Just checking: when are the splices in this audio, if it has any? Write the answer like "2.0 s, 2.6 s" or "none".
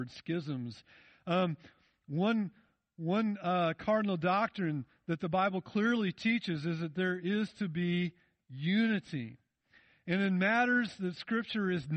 none